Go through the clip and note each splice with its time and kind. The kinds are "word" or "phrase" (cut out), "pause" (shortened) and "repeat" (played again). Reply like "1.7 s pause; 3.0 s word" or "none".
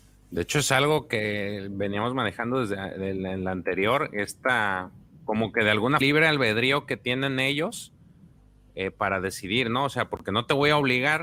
6.0 s phrase